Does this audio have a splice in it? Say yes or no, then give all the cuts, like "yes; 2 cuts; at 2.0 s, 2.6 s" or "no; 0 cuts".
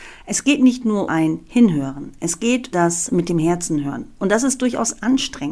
yes; 2 cuts; at 1.1 s, 2.7 s